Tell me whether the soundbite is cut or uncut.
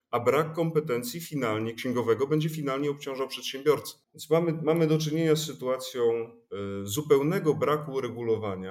cut